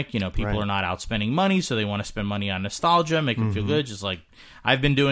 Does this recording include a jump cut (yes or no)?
no